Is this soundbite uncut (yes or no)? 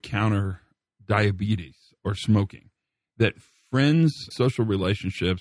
no